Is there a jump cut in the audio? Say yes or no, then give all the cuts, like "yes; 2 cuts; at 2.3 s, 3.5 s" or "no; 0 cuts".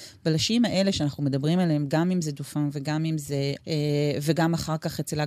yes; 1 cut; at 3.6 s